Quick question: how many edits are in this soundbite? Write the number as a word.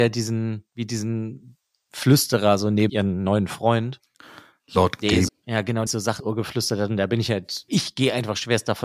five